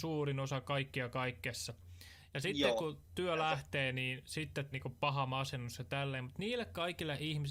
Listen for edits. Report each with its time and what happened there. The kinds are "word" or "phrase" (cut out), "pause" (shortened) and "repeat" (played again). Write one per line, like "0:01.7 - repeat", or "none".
0:04.7 - word